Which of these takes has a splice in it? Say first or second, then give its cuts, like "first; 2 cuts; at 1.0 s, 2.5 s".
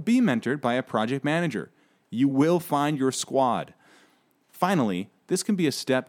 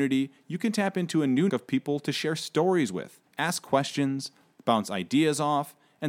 second; 2 cuts; at 1.5 s, 3.3 s